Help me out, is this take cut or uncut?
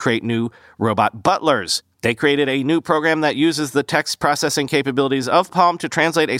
cut